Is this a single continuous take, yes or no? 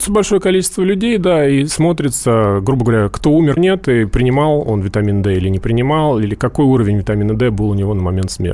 no